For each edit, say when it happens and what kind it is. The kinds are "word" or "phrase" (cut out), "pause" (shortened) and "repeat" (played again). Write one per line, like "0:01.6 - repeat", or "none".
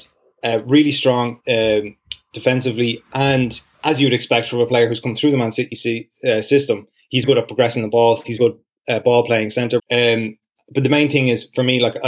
0:01.4 - word
0:03.7 - pause
0:07.2 - word
0:08.4 - word
0:09.8 - word